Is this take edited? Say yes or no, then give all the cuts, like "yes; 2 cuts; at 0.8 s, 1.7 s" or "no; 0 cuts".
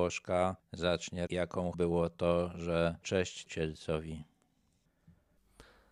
yes; 4 cuts; at 1.3 s, 1.7 s, 3.0 s, 3.5 s